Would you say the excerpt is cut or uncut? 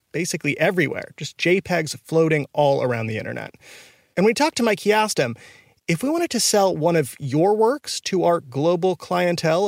uncut